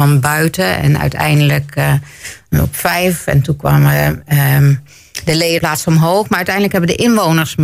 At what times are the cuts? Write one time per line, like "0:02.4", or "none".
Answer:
0:05.6

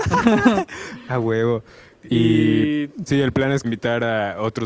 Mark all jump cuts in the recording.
0:03.1
0:03.6

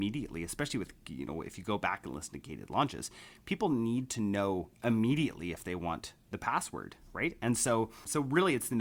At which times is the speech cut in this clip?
0:04.7

